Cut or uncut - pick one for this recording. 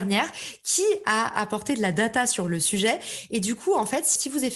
uncut